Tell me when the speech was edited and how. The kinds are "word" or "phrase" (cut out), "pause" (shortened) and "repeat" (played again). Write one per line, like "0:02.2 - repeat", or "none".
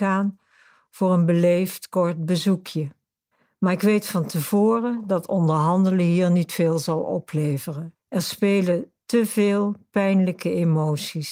0:03.3 - pause
0:08.0 - pause